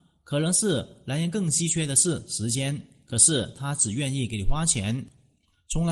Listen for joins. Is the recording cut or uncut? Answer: uncut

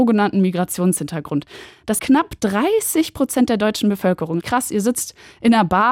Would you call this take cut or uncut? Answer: cut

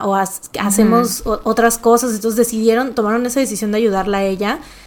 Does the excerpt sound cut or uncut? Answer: uncut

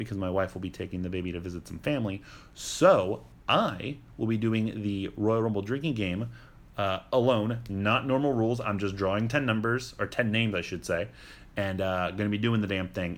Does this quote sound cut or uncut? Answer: uncut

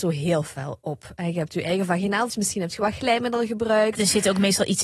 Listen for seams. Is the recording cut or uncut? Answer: cut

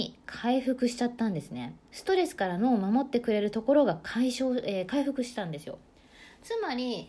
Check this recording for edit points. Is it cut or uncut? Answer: cut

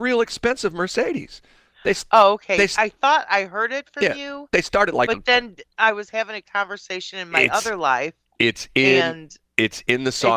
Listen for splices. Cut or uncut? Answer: uncut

